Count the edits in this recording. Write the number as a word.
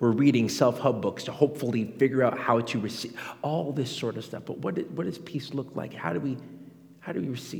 zero